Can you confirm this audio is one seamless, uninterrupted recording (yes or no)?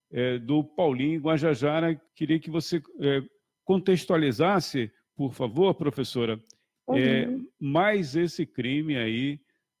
no